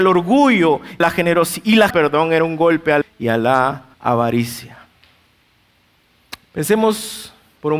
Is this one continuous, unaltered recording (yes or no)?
no